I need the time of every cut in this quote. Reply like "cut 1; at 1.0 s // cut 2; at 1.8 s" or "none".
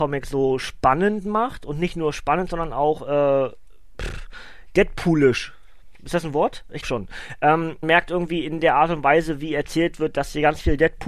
cut 1; at 6.8 s // cut 2; at 7.8 s